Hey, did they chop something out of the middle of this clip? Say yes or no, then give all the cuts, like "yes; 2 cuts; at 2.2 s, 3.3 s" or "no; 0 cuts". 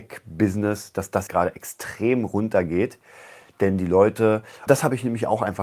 yes; 2 cuts; at 1.3 s, 4.7 s